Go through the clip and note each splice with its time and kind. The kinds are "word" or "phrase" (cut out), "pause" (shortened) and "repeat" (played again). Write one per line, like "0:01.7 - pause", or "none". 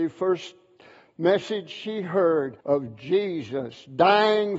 0:02.6 - pause